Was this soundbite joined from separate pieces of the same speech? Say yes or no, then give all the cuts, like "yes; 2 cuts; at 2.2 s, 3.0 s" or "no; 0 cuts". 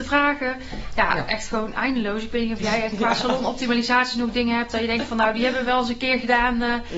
no; 0 cuts